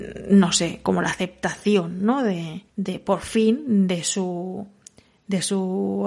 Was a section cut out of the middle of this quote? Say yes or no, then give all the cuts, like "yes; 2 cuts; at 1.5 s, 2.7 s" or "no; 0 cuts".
yes; 1 cut; at 2.7 s